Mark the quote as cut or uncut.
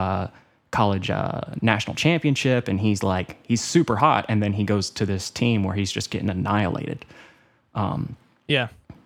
uncut